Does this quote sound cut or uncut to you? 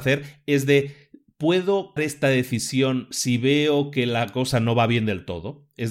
cut